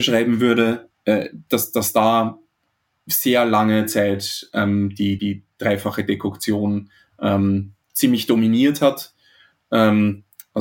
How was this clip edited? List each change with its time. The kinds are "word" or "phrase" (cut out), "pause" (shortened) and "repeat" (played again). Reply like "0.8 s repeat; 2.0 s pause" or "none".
0.9 s word; 5.2 s word